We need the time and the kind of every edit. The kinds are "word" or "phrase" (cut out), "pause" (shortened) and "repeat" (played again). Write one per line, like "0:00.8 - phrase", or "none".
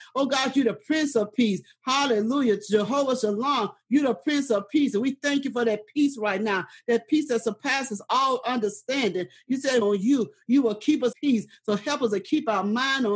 0:09.8 - phrase
0:11.1 - phrase